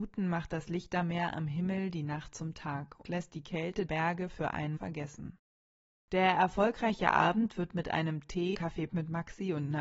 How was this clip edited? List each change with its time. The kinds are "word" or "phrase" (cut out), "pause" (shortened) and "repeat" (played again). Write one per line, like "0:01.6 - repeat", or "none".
0:03.0 - word
0:03.9 - word
0:04.8 - word
0:08.5 - word
0:08.9 - word